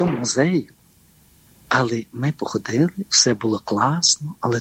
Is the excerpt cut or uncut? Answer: uncut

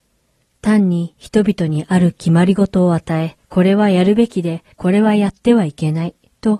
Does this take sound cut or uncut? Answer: cut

